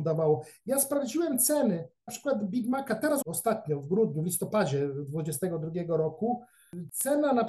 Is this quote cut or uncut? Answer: cut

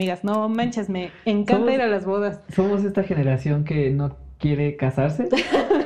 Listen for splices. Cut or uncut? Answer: uncut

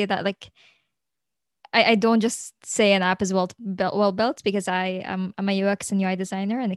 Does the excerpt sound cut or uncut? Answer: uncut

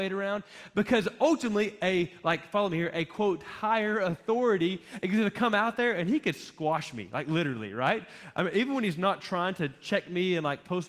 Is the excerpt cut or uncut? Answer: uncut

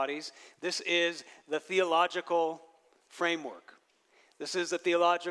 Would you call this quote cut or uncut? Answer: uncut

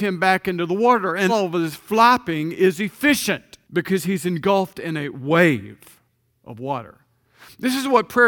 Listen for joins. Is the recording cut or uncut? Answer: cut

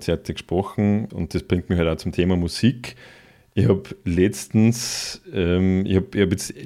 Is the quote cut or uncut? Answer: uncut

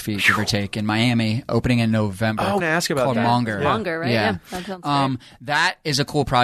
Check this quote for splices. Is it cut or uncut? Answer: cut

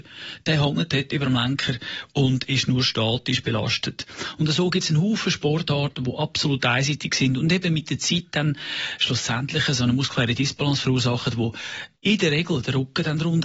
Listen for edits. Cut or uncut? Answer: uncut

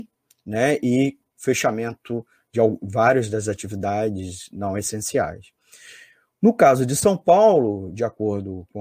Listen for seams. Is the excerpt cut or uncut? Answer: uncut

